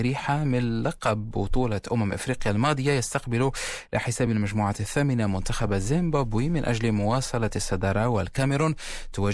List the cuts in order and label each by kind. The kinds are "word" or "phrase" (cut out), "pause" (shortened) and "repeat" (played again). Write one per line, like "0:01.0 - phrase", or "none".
none